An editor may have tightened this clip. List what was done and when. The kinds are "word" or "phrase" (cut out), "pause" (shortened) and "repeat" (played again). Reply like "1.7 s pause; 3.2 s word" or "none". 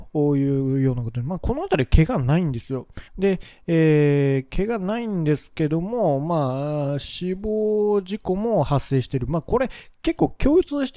3.1 s pause